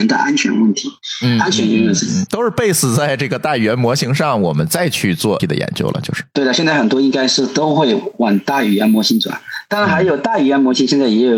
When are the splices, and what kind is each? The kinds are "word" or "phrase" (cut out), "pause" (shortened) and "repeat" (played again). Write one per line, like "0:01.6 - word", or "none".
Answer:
0:05.4 - word